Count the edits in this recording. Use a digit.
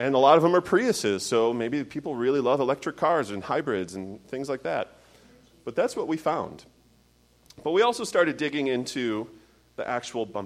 0